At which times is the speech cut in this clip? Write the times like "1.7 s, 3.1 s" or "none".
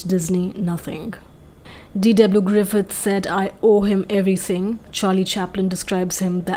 none